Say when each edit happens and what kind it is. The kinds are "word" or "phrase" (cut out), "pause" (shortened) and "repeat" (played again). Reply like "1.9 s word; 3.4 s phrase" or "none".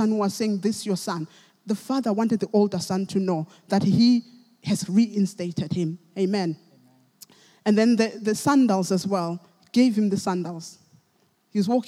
none

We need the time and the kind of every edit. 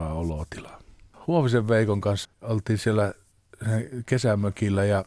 2.2 s word

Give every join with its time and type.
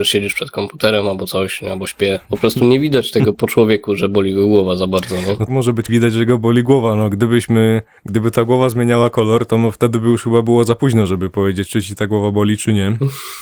3.3 s word; 5.5 s phrase; 5.9 s phrase; 8.0 s pause

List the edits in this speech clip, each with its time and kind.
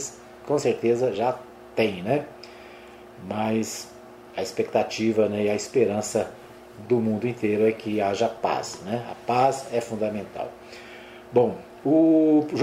none

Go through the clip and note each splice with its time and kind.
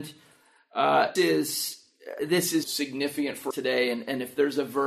1.2 s word; 2.2 s word; 2.6 s word; 3.5 s word

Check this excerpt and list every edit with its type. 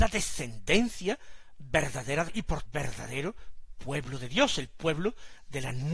2.3 s word; 2.6 s phrase

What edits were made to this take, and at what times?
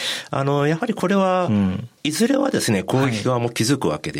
2.0 s pause

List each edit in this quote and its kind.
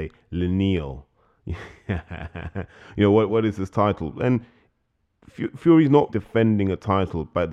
3.3 s word; 6.1 s word

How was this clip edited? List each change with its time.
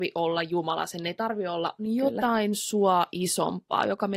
1.8 s phrase

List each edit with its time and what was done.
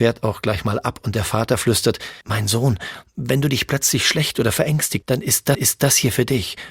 2.2 s pause; 5.0 s word; 5.5 s repeat

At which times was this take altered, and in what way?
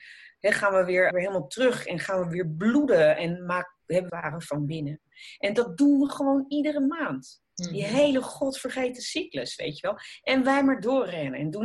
1.1 s word; 4.1 s phrase; 7.4 s pause

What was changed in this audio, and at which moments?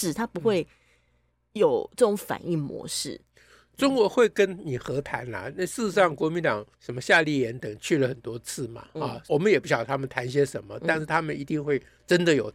6.7 s pause; 9.3 s word

